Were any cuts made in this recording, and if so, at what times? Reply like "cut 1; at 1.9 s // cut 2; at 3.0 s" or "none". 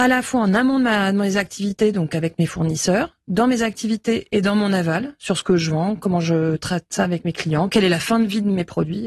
none